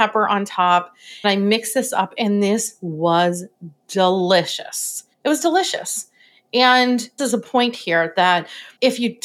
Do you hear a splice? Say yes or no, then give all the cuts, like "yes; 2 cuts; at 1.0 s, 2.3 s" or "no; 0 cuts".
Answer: yes; 3 cuts; at 1.2 s, 5.1 s, 7.2 s